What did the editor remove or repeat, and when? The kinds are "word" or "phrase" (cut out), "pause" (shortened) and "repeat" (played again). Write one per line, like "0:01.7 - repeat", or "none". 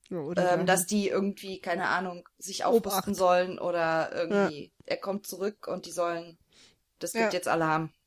none